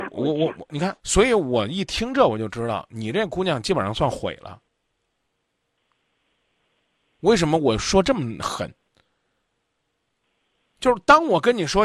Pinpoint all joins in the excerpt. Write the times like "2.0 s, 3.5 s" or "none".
1.0 s